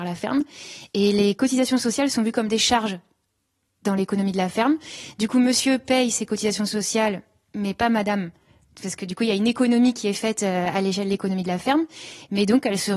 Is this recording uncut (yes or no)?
yes